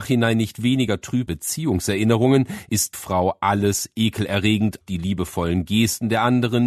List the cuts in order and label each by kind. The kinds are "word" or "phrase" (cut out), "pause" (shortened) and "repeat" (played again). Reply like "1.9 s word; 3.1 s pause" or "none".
1.3 s word; 2.9 s word; 4.8 s word